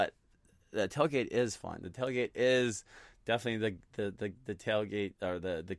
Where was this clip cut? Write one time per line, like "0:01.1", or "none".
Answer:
none